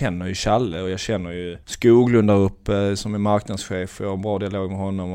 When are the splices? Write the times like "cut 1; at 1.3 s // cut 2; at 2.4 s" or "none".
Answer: cut 1; at 1.6 s